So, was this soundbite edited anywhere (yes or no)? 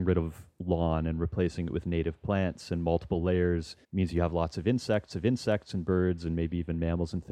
yes